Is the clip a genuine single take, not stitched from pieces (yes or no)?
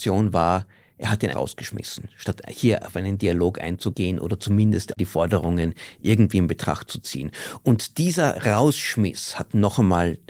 no